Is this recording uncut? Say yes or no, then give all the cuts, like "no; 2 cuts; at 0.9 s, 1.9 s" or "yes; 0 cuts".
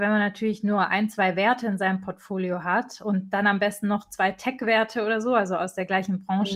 yes; 0 cuts